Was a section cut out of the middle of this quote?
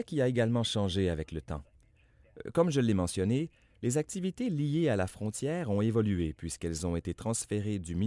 no; 0 cuts

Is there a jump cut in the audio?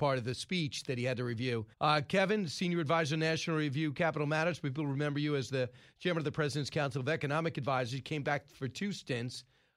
yes; 1 cut; at 1.7 s

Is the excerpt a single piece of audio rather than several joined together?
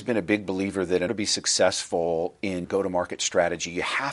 no; 2 cuts; at 1.1 s, 2.6 s

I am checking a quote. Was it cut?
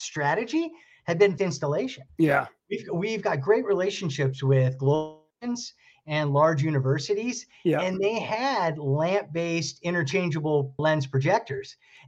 yes; 3 cuts; at 1.4 s, 5.3 s, 10.8 s

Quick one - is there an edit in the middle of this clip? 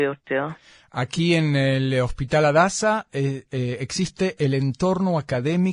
no; 0 cuts

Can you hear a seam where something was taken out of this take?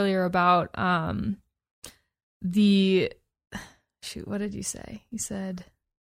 no; 0 cuts

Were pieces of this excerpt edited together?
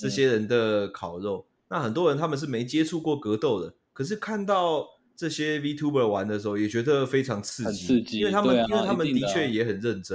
yes; 1 cut; at 5.1 s

